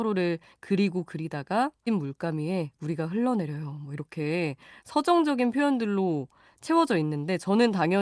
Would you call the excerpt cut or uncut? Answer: cut